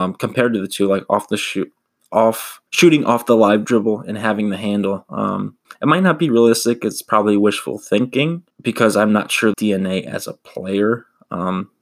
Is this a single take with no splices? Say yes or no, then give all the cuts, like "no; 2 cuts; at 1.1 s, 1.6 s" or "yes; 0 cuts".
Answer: no; 4 cuts; at 2.7 s, 5.6 s, 8.5 s, 9.5 s